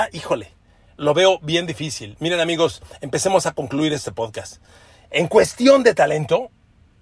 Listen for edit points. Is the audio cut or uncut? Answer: uncut